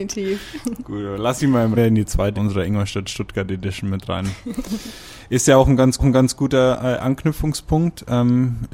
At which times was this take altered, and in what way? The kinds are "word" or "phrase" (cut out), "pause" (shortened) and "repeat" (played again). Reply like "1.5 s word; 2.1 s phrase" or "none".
1.7 s phrase; 2.3 s phrase; 6.0 s repeat